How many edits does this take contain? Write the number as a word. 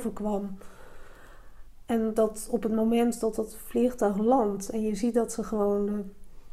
zero